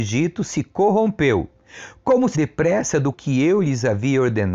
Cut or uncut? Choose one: cut